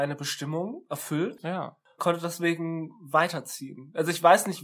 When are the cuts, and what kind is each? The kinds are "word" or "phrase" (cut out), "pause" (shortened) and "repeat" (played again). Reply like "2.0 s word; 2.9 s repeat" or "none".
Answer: 2.0 s word